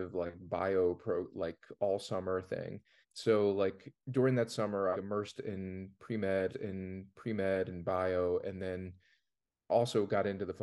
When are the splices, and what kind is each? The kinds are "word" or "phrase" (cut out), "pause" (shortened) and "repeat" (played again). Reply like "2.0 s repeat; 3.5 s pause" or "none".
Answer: 3.0 s pause; 4.0 s pause; 4.9 s phrase; 6.5 s repeat